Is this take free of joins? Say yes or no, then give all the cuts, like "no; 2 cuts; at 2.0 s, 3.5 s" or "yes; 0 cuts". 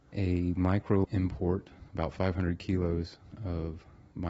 no; 1 cut; at 1.0 s